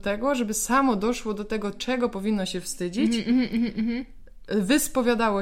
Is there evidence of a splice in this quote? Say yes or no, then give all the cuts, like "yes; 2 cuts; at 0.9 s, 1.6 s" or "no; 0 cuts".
no; 0 cuts